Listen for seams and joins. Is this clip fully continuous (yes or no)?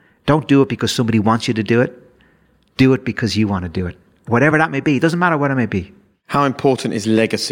yes